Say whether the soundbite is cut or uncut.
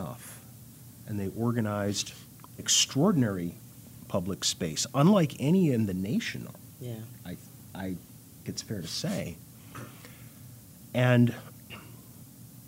cut